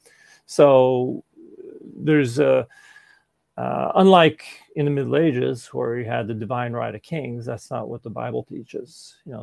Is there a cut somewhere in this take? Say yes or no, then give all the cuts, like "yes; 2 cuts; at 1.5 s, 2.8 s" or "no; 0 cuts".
no; 0 cuts